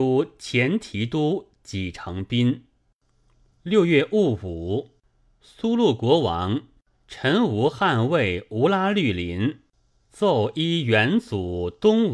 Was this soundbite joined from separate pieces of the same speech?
no; 0 cuts

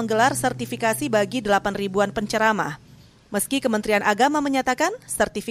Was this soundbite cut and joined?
no; 0 cuts

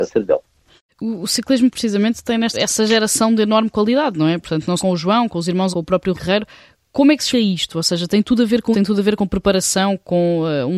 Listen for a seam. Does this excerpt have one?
yes; 7 cuts; at 1.7 s, 2.5 s, 4.8 s, 5.7 s, 6.1 s, 7.3 s, 8.7 s

